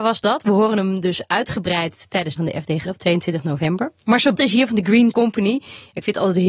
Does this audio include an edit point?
yes; 4 cuts; at 2.4 s, 2.8 s, 4.3 s, 5.1 s

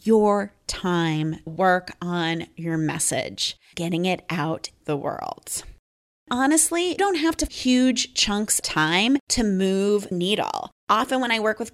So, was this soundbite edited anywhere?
yes; 7 cuts; at 1.5 s, 3.7 s, 4.8 s, 7.0 s, 7.5 s, 8.6 s, 10.1 s

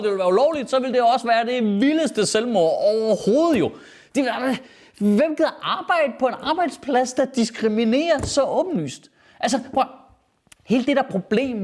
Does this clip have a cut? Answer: no; 0 cuts

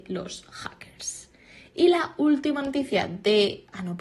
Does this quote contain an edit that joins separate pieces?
no; 0 cuts

